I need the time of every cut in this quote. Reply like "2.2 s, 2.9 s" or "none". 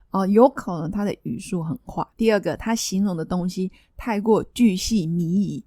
2.1 s